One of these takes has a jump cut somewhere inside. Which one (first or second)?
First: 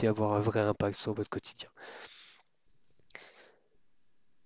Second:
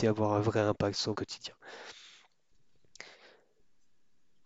second